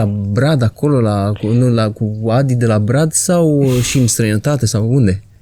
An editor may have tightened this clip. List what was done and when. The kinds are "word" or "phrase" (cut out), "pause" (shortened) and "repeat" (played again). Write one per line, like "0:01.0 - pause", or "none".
none